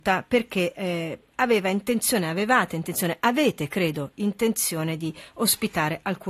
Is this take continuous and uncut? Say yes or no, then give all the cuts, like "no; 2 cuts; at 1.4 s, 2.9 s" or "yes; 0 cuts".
yes; 0 cuts